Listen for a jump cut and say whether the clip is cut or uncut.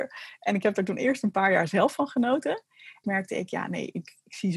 cut